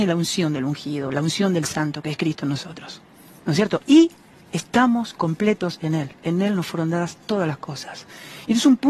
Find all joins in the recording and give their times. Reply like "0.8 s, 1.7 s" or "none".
none